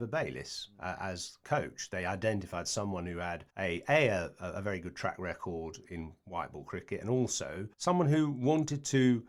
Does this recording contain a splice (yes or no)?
yes